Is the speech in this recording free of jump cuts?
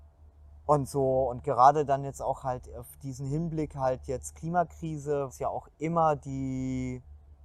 no; 1 cut; at 5.3 s

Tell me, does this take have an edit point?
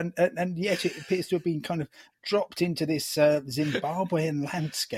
no; 0 cuts

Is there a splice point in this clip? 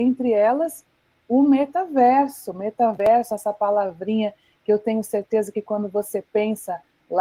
no; 0 cuts

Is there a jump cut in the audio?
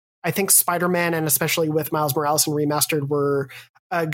no; 0 cuts

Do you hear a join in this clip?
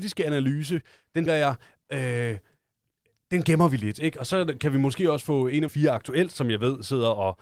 yes; 2 cuts; at 1.3 s, 5.7 s

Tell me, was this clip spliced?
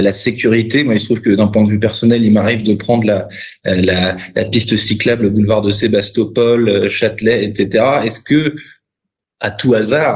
no; 0 cuts

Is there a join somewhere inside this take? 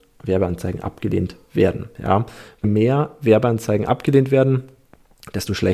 yes; 1 cut; at 2.6 s

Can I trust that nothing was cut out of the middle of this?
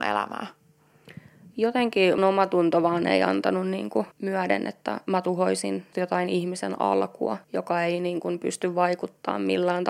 no; 4 cuts; at 2.2 s, 4.1 s, 5.9 s, 7.4 s

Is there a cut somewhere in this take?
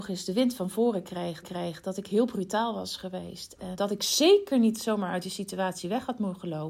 yes; 2 cuts; at 1.4 s, 3.8 s

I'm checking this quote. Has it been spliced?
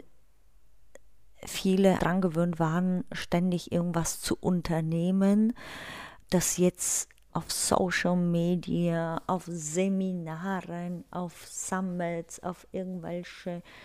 yes; 3 cuts; at 2.0 s, 6.2 s, 7.3 s

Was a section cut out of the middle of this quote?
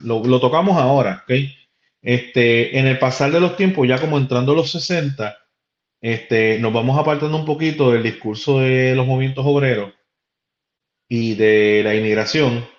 no; 0 cuts

